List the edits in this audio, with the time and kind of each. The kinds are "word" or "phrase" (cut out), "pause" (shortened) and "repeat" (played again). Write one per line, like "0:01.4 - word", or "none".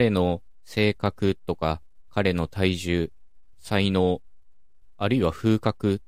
none